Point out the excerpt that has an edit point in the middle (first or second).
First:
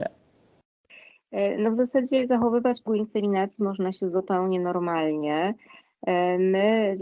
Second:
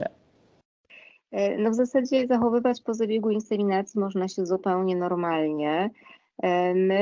first